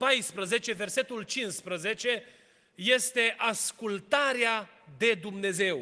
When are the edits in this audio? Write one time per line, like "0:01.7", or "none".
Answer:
none